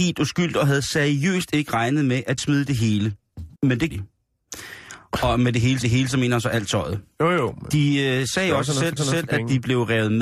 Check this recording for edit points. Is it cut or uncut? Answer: cut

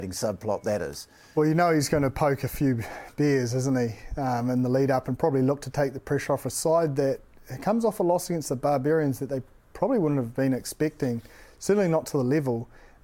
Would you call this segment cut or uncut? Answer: uncut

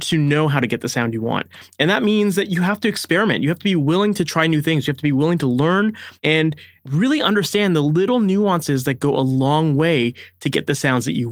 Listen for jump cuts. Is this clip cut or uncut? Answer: cut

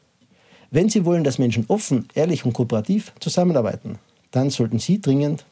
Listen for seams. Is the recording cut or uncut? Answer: uncut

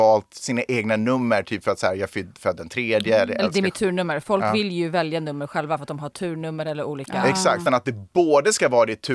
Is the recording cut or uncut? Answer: cut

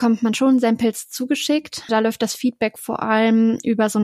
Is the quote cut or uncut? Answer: cut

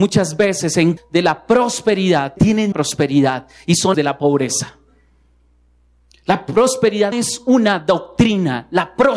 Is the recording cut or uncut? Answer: cut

